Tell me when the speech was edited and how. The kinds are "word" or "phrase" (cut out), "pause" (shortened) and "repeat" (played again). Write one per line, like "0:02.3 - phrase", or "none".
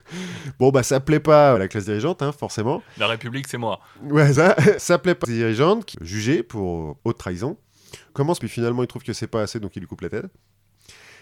0:01.6 - word
0:04.4 - word
0:05.2 - phrase
0:05.9 - phrase
0:08.4 - phrase

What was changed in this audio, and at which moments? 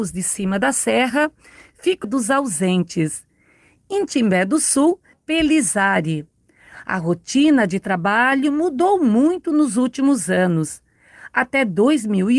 0:02.0 - phrase
0:05.1 - phrase

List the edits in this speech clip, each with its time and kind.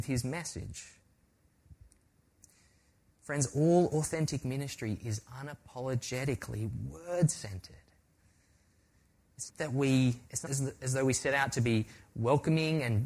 0:09.5 - word
0:10.5 - word

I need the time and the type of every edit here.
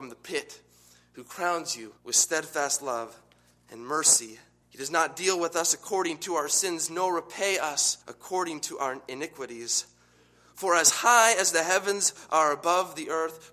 0:02.0 - pause
0:04.6 - pause
0:08.0 - pause

